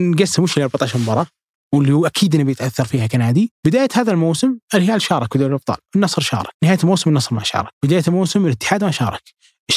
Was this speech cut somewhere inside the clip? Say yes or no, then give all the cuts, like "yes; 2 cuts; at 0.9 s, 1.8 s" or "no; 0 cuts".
no; 0 cuts